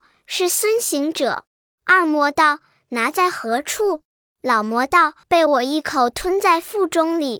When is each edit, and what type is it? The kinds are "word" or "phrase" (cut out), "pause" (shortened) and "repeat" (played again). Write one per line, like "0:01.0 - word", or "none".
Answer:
0:01.5 - pause
0:04.1 - pause
0:05.2 - pause